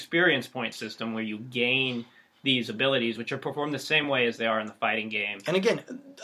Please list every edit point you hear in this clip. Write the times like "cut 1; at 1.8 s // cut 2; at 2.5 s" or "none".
none

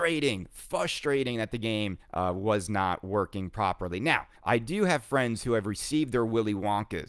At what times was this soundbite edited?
cut 1; at 2.0 s // cut 2; at 4.4 s

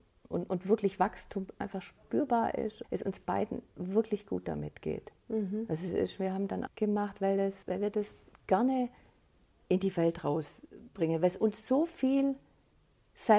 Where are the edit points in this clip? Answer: cut 1; at 2.8 s // cut 2; at 6.7 s // cut 3; at 7.6 s // cut 4; at 8.3 s

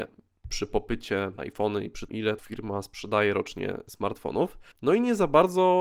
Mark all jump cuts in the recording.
cut 1; at 1.4 s // cut 2; at 2.1 s // cut 3; at 2.4 s // cut 4; at 4.7 s

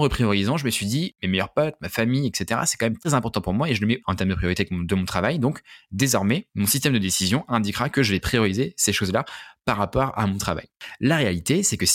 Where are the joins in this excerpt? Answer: cut 1; at 4.0 s

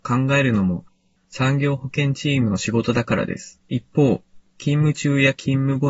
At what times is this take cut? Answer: cut 1; at 3.6 s

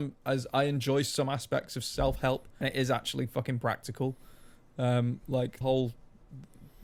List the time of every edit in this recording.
cut 1; at 2.6 s // cut 2; at 5.6 s

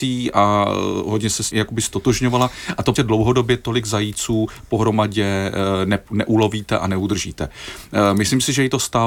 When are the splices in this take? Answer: cut 1; at 1.5 s // cut 2; at 3.0 s

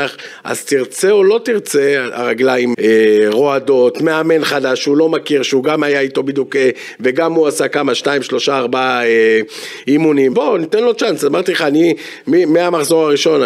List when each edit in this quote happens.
cut 1; at 2.7 s // cut 2; at 10.3 s

